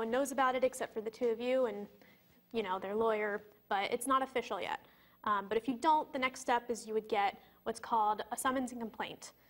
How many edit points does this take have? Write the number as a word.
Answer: zero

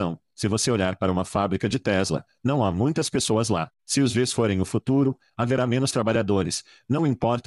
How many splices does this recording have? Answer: one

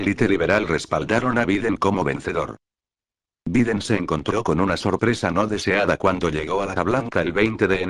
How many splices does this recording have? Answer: one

